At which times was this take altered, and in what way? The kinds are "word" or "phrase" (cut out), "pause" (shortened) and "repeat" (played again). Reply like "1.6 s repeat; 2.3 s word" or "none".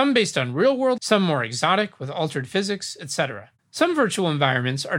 1.0 s word; 3.6 s pause